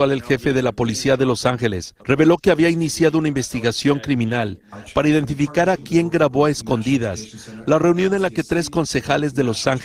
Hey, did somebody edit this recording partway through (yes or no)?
yes